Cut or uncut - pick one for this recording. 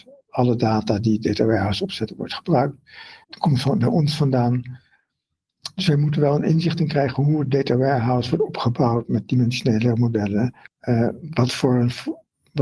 cut